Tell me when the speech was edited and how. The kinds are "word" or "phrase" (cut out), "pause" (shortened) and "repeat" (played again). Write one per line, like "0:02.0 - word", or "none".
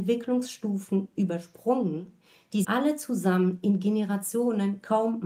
0:02.6 - word